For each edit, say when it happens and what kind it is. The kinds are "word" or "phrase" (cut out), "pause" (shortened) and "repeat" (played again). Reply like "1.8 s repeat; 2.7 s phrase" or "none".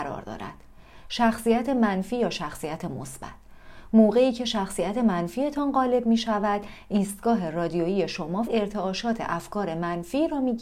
8.4 s word